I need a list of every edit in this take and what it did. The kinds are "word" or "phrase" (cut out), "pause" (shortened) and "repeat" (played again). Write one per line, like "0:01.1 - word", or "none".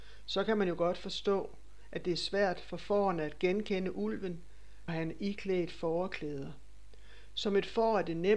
0:04.9 - word